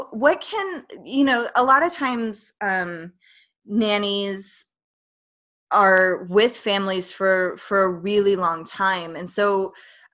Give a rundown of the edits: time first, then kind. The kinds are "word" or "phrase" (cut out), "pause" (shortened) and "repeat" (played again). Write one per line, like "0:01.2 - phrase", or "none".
none